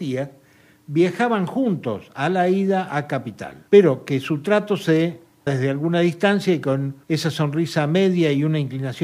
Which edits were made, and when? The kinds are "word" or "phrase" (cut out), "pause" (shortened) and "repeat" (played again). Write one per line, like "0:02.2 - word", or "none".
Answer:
0:03.7 - pause
0:05.5 - word
0:07.0 - pause